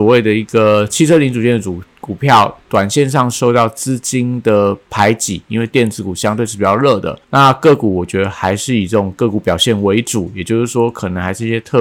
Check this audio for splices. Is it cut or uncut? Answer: cut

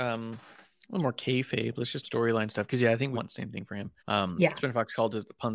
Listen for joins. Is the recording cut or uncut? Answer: cut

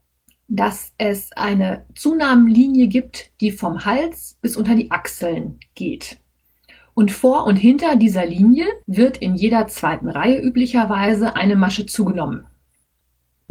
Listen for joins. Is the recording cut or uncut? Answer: cut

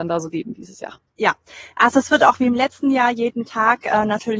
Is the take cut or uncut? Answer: uncut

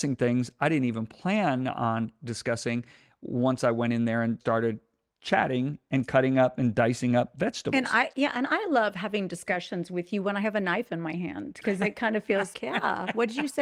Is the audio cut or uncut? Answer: cut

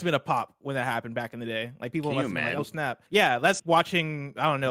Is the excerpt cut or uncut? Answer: cut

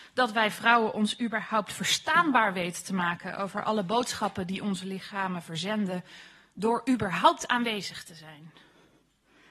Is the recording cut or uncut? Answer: uncut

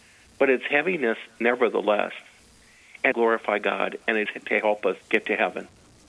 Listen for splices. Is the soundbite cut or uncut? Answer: cut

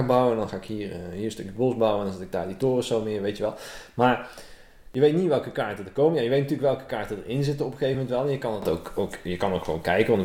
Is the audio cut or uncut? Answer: uncut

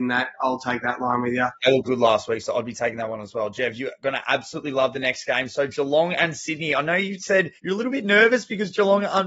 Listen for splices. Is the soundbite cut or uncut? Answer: cut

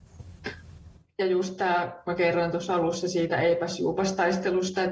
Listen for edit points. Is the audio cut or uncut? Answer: uncut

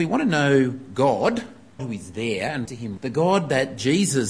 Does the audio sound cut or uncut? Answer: cut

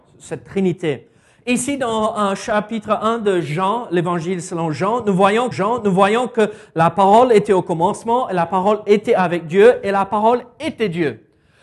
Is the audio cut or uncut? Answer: cut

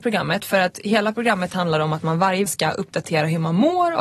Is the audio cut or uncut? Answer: cut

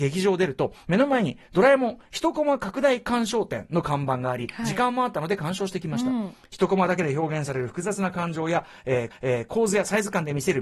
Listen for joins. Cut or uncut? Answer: cut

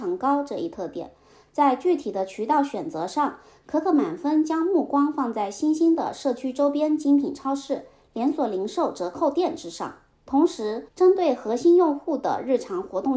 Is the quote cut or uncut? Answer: cut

